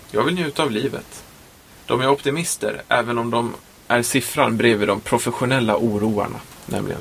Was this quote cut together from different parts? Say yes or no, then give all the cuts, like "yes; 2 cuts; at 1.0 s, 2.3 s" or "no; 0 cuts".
no; 0 cuts